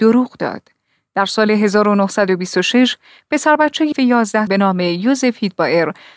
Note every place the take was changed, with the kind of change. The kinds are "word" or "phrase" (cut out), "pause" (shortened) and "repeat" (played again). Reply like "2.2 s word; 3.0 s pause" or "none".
3.9 s word; 4.5 s word